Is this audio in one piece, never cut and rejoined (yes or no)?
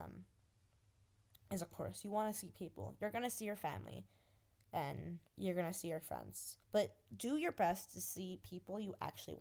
no